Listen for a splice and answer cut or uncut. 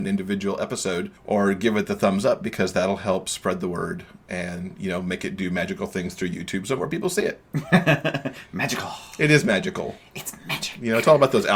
cut